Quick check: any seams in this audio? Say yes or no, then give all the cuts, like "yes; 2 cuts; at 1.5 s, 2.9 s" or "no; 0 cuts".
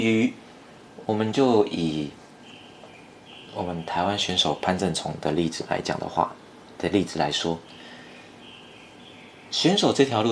no; 0 cuts